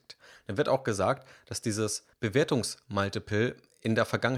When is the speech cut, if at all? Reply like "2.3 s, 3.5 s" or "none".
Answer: 2.1 s